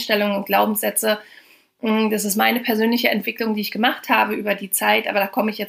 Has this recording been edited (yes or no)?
no